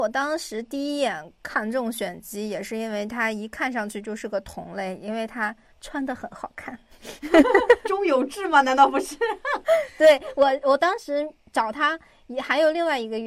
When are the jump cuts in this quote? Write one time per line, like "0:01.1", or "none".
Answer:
0:07.8